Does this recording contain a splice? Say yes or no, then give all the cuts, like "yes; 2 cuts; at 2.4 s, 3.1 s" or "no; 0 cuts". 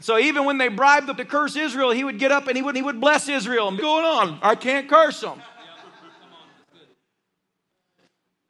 yes; 3 cuts; at 1.2 s, 2.7 s, 3.8 s